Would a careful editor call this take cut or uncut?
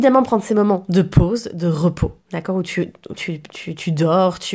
cut